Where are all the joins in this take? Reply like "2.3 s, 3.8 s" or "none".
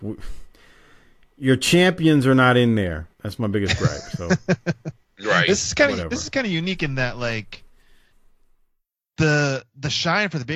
3.1 s

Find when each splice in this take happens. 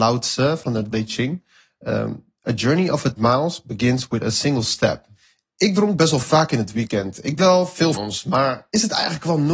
0.9 s, 3.2 s, 7.4 s, 7.9 s

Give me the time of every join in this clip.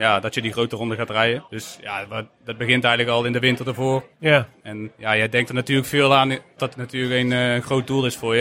1.5 s, 6.6 s

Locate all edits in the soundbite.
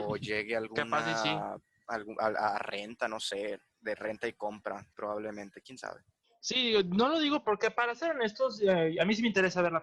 4.9 s, 6.2 s, 7.4 s

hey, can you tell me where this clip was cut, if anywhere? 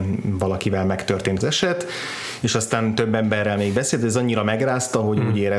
1.4 s

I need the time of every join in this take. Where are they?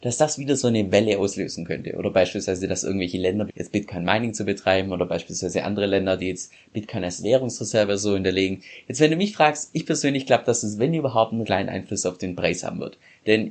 3.5 s, 11.4 s

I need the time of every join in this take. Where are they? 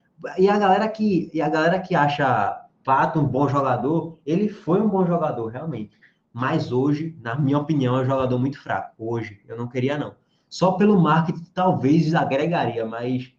none

